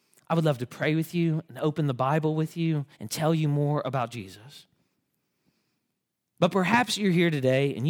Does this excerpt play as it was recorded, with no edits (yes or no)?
no